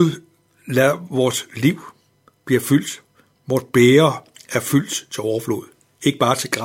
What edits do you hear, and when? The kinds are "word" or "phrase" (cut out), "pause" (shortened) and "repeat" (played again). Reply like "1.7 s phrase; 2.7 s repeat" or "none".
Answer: none